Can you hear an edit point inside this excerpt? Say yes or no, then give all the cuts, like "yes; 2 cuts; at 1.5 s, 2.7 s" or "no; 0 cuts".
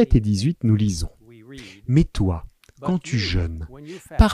no; 0 cuts